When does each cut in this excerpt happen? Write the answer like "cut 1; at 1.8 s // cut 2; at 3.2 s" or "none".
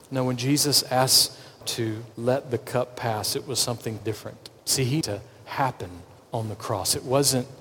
cut 1; at 1.6 s // cut 2; at 2.1 s // cut 3; at 4.0 s // cut 4; at 4.6 s // cut 5; at 5.0 s // cut 6; at 6.2 s

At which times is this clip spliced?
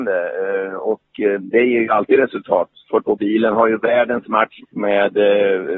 cut 1; at 3.0 s // cut 2; at 4.6 s

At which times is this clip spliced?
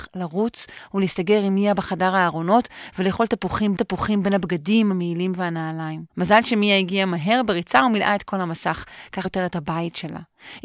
cut 1; at 3.8 s // cut 2; at 6.1 s // cut 3; at 9.2 s

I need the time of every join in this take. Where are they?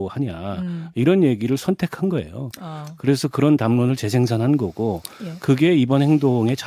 none

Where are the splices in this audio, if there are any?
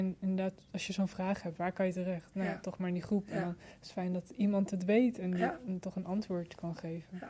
none

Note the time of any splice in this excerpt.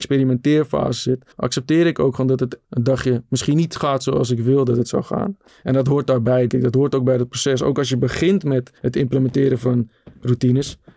cut 1; at 1.3 s // cut 2; at 2.6 s // cut 3; at 5.5 s // cut 4; at 6.5 s // cut 5; at 8.8 s

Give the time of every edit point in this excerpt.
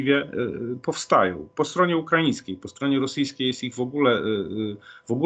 none

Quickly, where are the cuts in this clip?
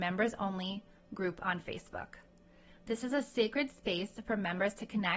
none

